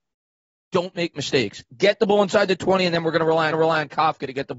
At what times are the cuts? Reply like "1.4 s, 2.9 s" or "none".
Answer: 3.5 s

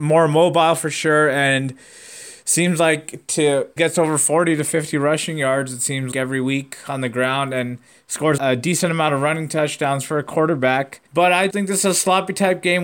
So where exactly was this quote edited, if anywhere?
3.8 s, 6.1 s, 8.4 s, 11.1 s, 11.5 s

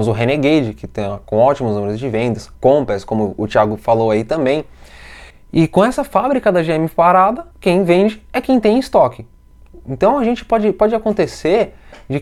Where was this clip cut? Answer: 2.5 s, 5.3 s, 7.5 s

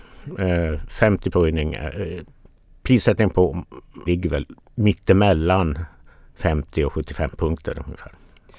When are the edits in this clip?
1.3 s, 4.1 s

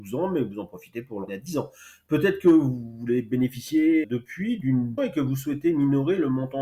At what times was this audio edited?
1.3 s, 4.0 s, 5.0 s

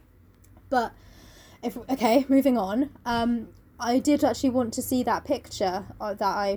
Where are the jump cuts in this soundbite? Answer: none

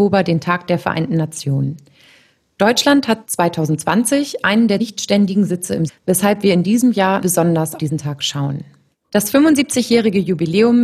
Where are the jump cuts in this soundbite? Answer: 4.8 s, 5.9 s, 7.2 s, 7.8 s

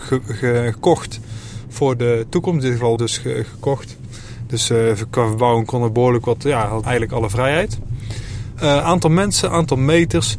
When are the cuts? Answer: 3.0 s, 6.8 s

